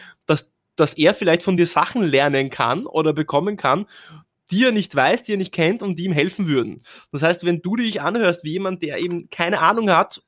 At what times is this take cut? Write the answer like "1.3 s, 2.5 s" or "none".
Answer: none